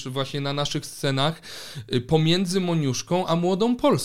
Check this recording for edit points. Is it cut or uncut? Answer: uncut